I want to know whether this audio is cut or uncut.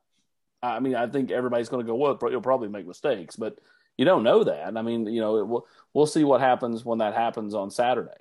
uncut